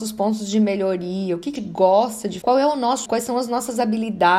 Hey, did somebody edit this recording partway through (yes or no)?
yes